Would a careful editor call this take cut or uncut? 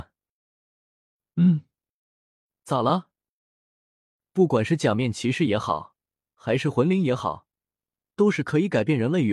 uncut